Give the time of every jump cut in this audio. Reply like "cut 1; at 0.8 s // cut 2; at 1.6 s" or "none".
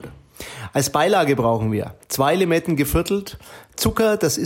none